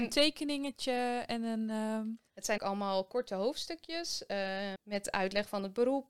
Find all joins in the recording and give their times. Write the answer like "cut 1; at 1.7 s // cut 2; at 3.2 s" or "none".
cut 1; at 2.6 s // cut 2; at 4.8 s